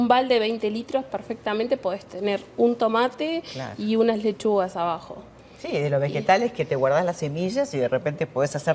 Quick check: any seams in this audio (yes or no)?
no